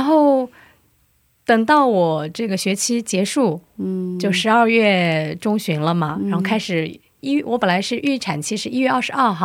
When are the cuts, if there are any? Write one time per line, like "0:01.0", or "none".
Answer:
none